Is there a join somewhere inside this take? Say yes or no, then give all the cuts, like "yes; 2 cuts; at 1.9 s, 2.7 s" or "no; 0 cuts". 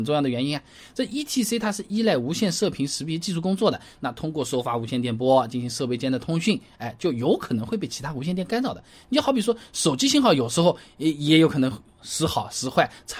no; 0 cuts